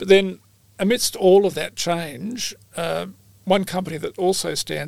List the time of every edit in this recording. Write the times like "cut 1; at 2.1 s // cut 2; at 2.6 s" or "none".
none